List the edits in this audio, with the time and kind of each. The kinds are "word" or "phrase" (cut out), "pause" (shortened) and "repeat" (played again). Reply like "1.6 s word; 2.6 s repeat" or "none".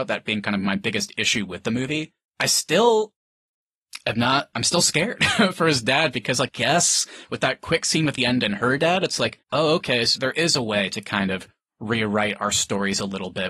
2.3 s pause; 4.5 s word; 6.5 s phrase; 8.2 s phrase; 9.4 s pause; 10.2 s word